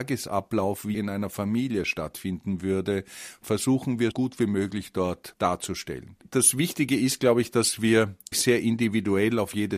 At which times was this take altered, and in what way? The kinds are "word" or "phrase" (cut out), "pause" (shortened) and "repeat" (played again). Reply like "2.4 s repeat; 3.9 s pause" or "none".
0.9 s word; 4.1 s word; 5.3 s word; 8.3 s word

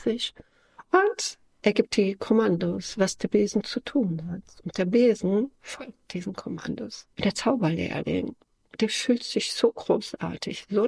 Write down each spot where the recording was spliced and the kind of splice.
7.1 s pause

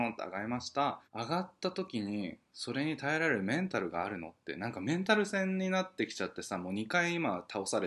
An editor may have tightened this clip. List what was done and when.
1.0 s pause

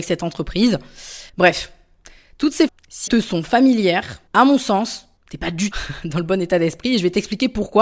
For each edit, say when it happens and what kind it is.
1.3 s pause; 2.7 s word; 3.1 s word; 4.3 s pause; 5.2 s pause; 5.7 s word

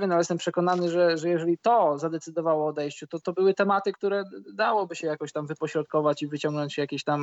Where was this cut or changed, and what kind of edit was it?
3.2 s word

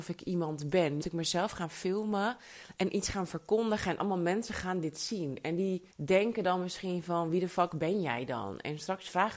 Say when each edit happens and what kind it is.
1.0 s word; 5.9 s pause

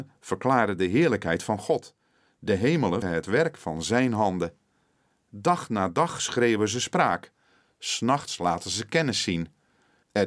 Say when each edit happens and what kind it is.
3.0 s word

